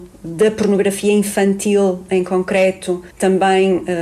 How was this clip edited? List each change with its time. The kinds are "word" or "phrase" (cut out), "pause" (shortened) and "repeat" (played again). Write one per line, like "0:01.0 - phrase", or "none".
0:03.1 - pause